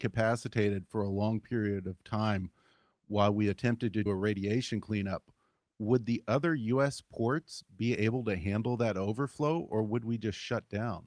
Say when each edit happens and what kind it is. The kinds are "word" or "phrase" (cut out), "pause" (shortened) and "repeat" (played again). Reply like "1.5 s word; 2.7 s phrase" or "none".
4.1 s word